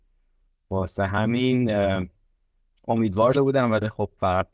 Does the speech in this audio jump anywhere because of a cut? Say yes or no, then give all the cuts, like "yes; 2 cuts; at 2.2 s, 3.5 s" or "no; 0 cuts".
yes; 1 cut; at 3.3 s